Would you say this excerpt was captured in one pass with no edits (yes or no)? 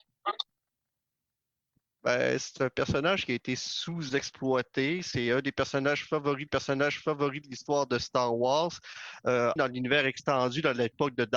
no